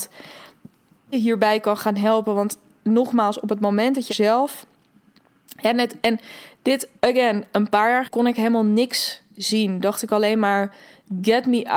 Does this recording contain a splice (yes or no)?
yes